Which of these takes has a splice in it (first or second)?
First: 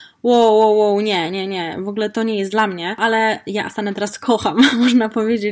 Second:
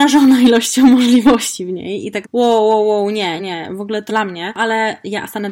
second